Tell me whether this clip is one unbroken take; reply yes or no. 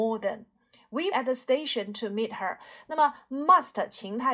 no